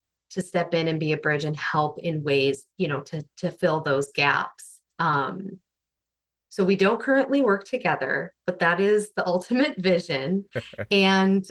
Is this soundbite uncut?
no; 1 cut; at 4.9 s

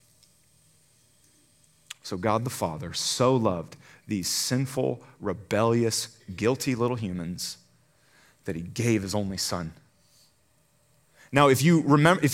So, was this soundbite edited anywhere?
no; 0 cuts

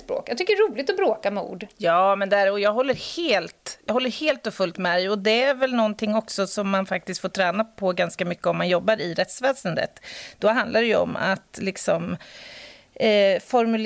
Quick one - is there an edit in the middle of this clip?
no; 0 cuts

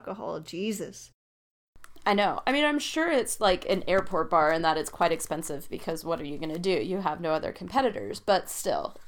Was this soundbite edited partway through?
no; 0 cuts

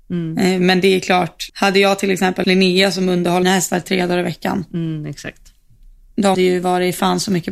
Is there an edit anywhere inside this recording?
yes; 4 cuts; at 1.5 s, 2.4 s, 3.4 s, 6.3 s

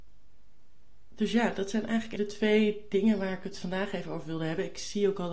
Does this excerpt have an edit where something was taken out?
yes; 1 cut; at 2.2 s

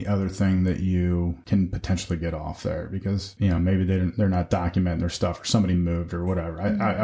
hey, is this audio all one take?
yes; 0 cuts

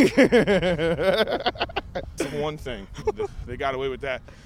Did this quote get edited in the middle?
yes; 3 cuts; at 2.2 s, 2.6 s, 3.0 s

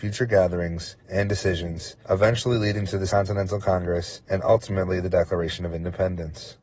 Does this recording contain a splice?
yes; 4 cuts; at 1.0 s, 2.0 s, 3.1 s, 4.2 s

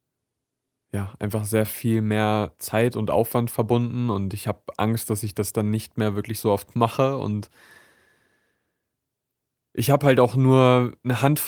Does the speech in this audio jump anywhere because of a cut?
no; 0 cuts

